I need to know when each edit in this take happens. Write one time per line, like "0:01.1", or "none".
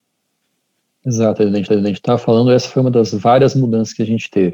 0:01.7